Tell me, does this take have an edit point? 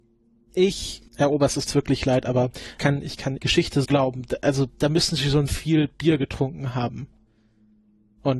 yes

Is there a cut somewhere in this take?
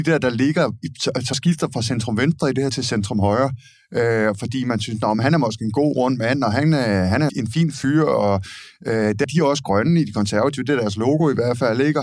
yes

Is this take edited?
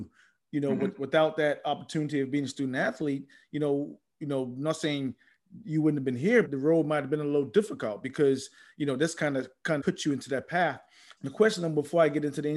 yes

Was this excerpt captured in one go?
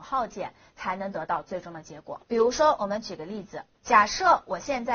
no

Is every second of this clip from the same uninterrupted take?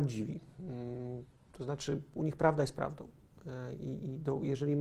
yes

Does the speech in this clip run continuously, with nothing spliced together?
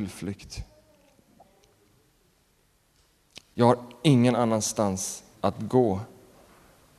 no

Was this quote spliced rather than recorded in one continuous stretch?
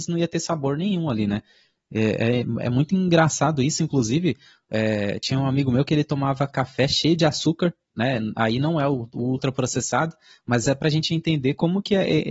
no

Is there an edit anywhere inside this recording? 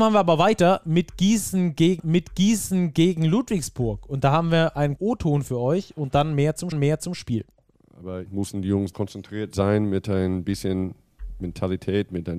yes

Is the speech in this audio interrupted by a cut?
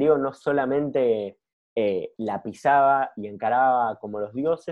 no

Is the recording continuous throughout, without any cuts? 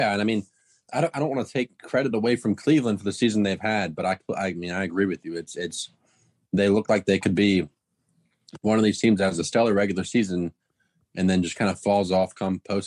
yes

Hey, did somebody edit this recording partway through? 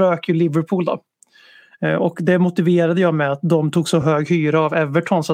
no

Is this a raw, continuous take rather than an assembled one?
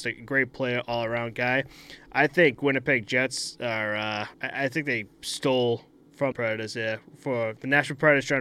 no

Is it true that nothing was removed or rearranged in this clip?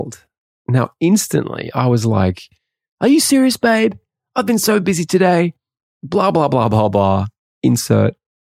yes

